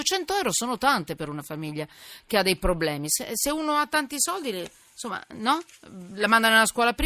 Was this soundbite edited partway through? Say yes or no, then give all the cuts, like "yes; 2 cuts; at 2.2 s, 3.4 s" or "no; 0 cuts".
no; 0 cuts